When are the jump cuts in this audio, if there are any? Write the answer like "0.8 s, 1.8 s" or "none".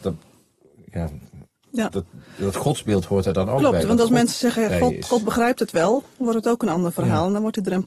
none